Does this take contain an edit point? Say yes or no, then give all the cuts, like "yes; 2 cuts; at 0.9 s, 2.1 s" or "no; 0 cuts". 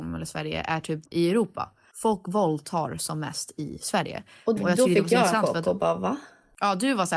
yes; 2 cuts; at 1.1 s, 4.6 s